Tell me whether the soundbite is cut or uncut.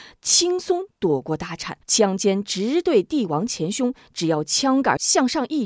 cut